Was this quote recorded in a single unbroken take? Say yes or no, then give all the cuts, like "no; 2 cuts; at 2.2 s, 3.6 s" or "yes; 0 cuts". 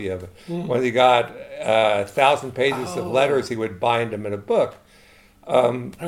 yes; 0 cuts